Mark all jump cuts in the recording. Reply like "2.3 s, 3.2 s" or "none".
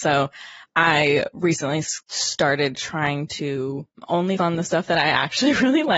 2.0 s, 4.4 s